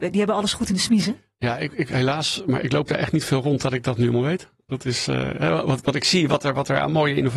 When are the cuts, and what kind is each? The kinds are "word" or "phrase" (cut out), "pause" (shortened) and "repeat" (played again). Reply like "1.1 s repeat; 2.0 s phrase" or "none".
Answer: none